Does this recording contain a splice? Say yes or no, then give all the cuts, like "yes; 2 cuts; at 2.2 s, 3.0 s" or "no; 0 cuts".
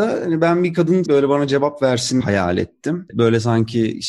yes; 2 cuts; at 1.0 s, 2.2 s